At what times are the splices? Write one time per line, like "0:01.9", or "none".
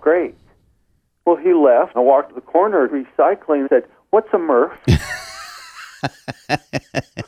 0:01.9
0:02.3
0:02.9
0:03.6